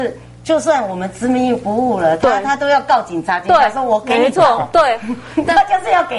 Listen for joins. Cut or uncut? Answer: uncut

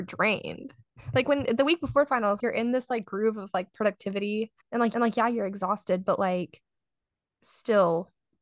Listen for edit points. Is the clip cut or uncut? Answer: cut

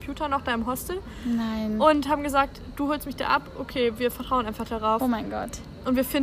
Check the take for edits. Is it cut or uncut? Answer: uncut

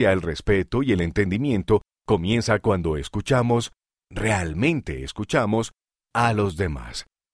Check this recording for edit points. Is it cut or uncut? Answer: uncut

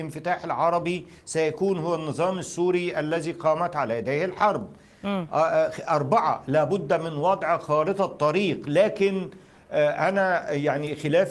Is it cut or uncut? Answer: uncut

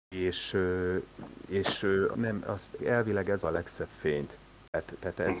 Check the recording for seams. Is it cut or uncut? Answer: cut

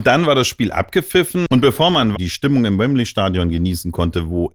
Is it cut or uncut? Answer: cut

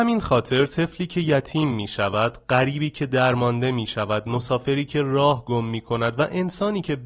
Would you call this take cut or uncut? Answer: uncut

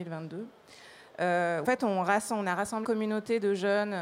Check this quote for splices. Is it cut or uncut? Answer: cut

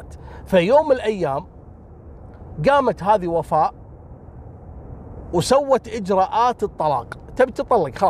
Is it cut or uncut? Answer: uncut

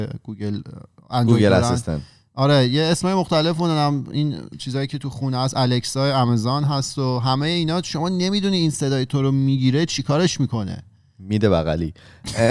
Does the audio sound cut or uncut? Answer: uncut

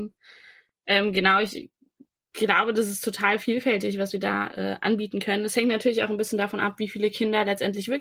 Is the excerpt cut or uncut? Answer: uncut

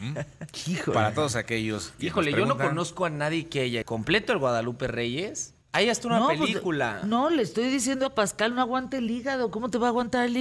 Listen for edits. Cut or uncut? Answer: cut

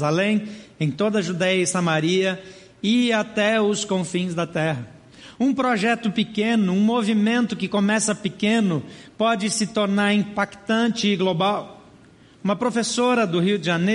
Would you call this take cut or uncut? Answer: uncut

